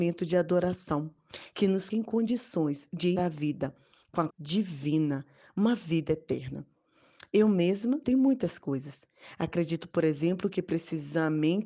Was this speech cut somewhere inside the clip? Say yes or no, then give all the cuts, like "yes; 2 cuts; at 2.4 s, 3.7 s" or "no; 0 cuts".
yes; 4 cuts; at 1.9 s, 3.2 s, 4.3 s, 8.0 s